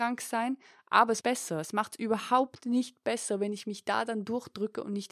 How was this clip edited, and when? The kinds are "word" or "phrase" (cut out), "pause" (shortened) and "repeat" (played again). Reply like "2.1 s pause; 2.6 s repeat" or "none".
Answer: 1.2 s phrase

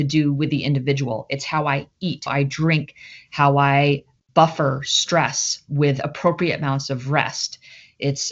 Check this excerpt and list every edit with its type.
2.3 s word; 5.7 s word

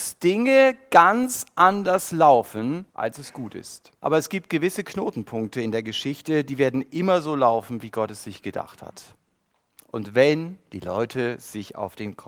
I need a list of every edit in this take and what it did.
2.9 s pause; 4.0 s pause

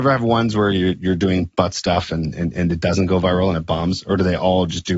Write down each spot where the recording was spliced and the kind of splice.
1.5 s pause

